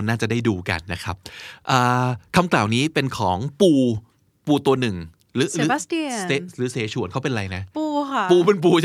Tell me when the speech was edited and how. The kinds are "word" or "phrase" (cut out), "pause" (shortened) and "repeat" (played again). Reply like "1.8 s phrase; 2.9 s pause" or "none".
none

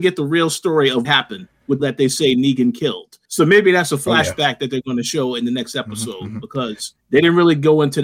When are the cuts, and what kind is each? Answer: 1.0 s word; 1.8 s phrase; 3.2 s pause; 7.0 s pause

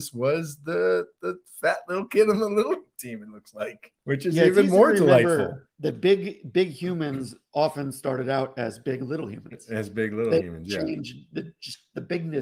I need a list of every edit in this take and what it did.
4.0 s pause; 5.6 s pause

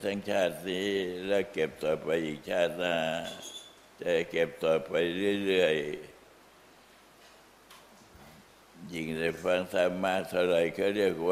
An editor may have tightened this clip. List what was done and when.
none

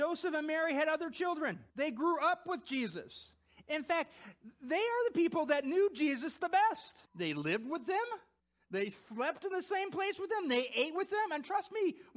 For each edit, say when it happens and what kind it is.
1.7 s pause; 7.1 s pause; 8.4 s pause

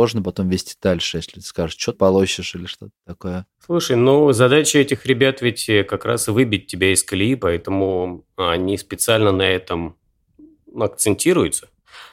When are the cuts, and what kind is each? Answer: 1.9 s phrase; 3.5 s pause

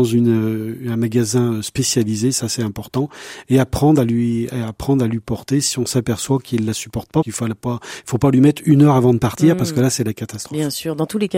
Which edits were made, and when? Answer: 7.2 s word

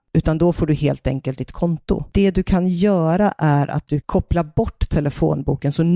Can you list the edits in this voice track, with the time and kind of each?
1.4 s word; 4.0 s word

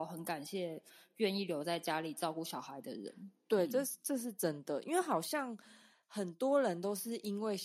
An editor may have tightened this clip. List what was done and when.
none

